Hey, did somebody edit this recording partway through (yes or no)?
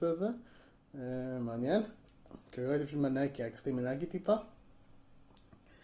yes